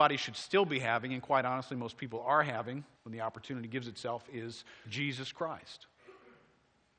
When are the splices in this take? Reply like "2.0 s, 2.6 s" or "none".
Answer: 3.0 s, 4.8 s

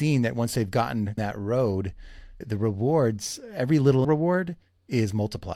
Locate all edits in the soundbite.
1.2 s, 2.4 s, 4.0 s

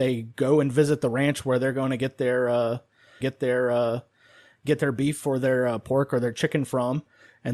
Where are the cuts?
3.2 s

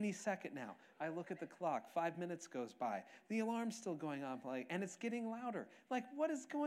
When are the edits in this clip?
none

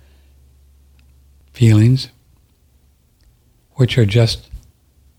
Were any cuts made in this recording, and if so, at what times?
none

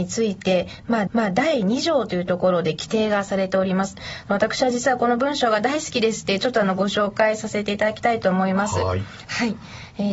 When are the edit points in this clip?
1.1 s

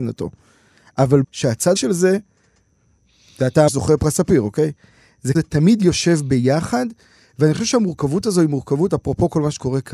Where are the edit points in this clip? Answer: 1.2 s, 1.8 s, 3.7 s, 5.3 s

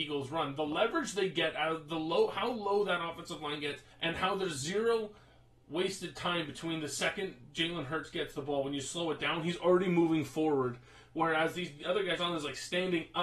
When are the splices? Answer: 3.9 s, 12.2 s

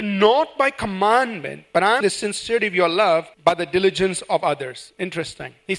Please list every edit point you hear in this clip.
2.0 s, 3.3 s

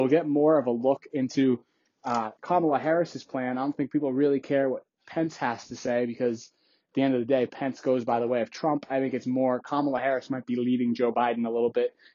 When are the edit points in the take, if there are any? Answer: none

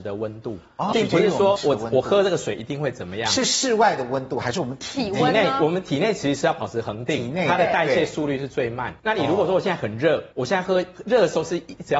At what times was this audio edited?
0.9 s, 1.6 s, 9.0 s, 10.3 s

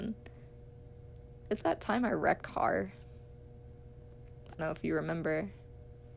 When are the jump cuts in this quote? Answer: 1.6 s, 2.4 s, 4.6 s

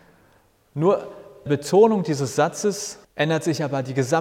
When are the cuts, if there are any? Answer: 1.5 s, 3.0 s

